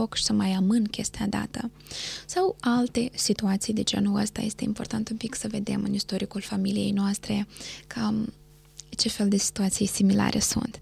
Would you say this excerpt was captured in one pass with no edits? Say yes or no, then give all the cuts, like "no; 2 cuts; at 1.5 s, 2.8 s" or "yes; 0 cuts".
yes; 0 cuts